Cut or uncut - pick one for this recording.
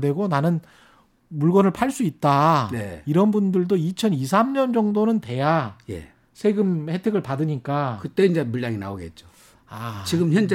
uncut